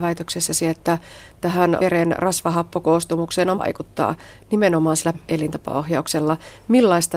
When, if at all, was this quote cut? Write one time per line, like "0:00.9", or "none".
0:01.8
0:03.5
0:05.1